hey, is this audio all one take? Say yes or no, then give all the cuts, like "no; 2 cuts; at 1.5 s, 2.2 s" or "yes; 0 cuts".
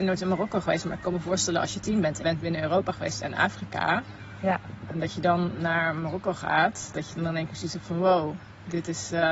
no; 1 cut; at 2.2 s